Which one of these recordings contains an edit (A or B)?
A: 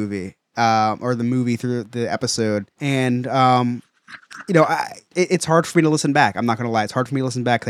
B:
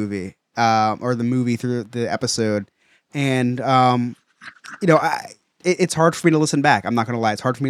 A